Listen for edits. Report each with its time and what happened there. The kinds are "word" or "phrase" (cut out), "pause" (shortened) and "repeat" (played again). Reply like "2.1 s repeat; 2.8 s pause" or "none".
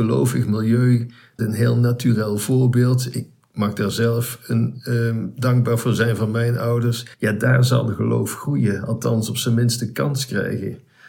1.4 s word; 7.1 s pause